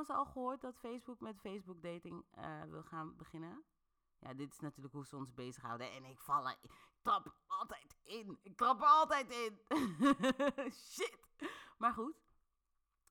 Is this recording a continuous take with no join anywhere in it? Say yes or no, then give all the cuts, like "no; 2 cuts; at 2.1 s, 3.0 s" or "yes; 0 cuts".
yes; 0 cuts